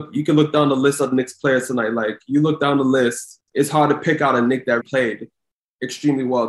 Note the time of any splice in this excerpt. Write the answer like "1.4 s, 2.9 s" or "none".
3.5 s, 4.8 s